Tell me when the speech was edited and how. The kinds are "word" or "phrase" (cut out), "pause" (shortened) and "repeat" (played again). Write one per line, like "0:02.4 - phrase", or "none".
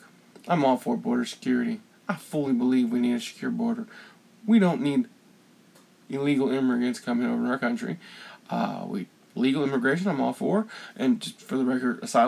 none